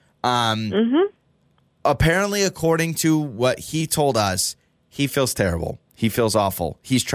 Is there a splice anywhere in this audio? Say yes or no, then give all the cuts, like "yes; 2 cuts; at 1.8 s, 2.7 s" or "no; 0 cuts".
no; 0 cuts